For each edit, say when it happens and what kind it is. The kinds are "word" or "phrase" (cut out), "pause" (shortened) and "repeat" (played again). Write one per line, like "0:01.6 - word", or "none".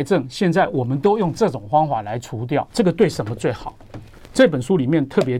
0:02.7 - pause

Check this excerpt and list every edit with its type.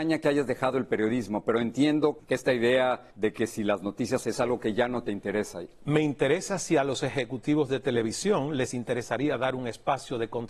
0:02.2 - word
0:03.1 - pause
0:04.2 - phrase

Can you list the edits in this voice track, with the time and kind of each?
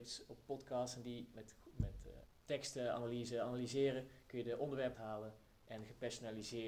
0:01.3 - word
0:04.9 - word

